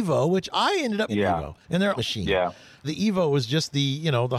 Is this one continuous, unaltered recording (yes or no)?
no